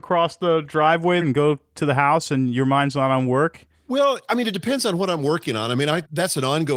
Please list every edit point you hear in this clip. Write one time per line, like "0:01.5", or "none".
0:01.2